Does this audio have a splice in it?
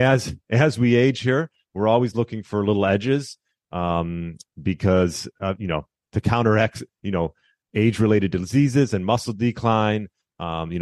no; 0 cuts

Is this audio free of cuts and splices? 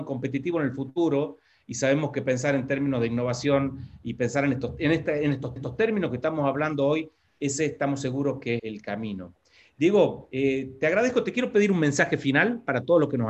no; 2 cuts; at 5.6 s, 8.6 s

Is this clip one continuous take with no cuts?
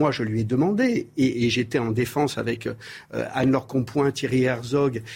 yes; 0 cuts

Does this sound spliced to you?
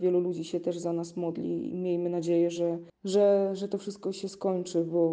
no; 0 cuts

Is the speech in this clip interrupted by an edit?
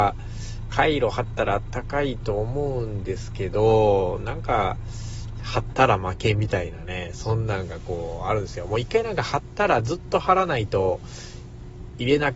no; 0 cuts

